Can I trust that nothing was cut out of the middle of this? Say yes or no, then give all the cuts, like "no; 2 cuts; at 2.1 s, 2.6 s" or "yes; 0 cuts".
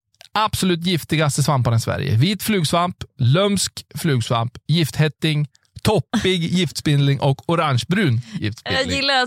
yes; 0 cuts